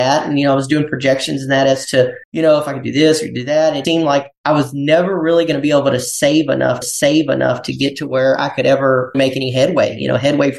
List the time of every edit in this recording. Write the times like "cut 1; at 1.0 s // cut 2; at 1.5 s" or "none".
cut 1; at 2.2 s // cut 2; at 3.8 s // cut 3; at 6.8 s // cut 4; at 9.1 s